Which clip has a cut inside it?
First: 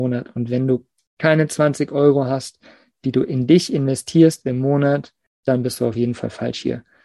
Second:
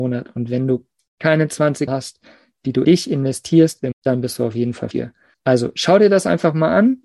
second; 4 cuts; at 1.9 s, 2.8 s, 3.9 s, 4.9 s

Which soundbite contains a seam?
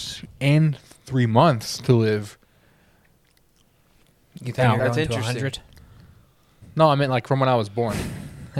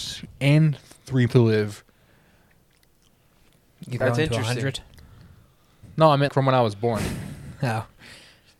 second; 3 cuts; at 1.3 s, 4.0 s, 6.3 s

